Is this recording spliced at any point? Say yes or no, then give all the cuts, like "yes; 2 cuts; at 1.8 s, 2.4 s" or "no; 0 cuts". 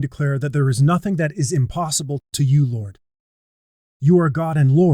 no; 0 cuts